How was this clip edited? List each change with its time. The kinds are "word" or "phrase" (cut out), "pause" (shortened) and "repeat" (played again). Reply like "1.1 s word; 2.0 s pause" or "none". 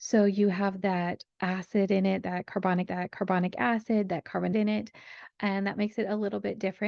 1.3 s pause; 2.9 s repeat; 4.5 s word

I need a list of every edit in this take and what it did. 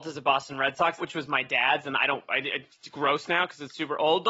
1.0 s word

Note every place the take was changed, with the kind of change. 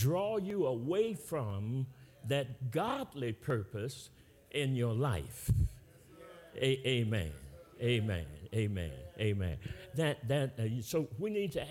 none

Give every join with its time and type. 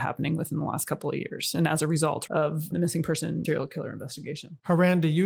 2.3 s word; 2.7 s word; 3.4 s word

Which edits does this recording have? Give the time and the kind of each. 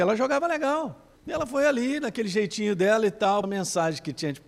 1.2 s pause; 3.4 s word

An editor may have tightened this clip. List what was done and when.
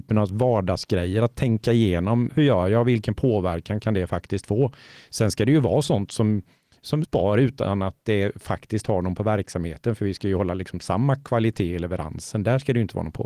2.3 s word; 7.0 s word; 9.2 s word

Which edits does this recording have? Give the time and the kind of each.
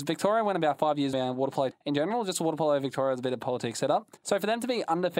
1.1 s phrase; 1.7 s word; 4.2 s pause

